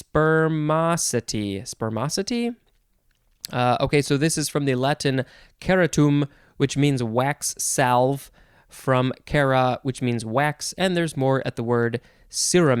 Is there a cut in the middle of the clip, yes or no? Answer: no